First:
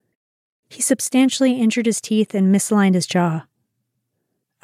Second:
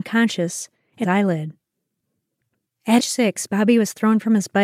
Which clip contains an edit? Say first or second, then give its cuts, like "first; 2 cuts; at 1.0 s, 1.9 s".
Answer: second; 2 cuts; at 1.0 s, 3.0 s